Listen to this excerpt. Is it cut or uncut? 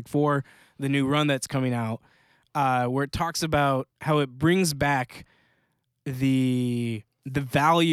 cut